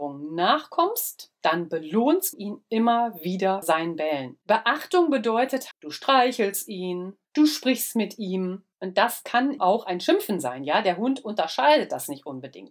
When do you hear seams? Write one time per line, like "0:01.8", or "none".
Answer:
0:02.3
0:03.6
0:04.4
0:05.7
0:07.3
0:08.7
0:09.6